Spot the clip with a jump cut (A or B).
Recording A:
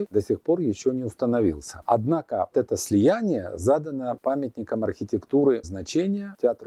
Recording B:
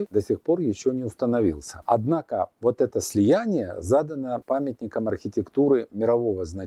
A